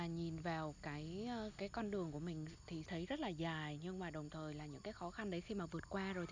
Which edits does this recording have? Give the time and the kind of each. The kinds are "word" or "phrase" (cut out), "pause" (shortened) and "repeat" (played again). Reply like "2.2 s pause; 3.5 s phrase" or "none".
2.9 s word